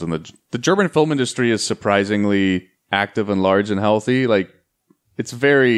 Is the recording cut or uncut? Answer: cut